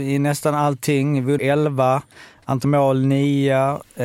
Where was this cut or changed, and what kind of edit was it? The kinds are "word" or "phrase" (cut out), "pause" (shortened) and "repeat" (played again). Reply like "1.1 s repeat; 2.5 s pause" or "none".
1.4 s word; 2.6 s word